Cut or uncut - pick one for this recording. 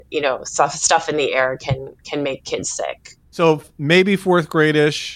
uncut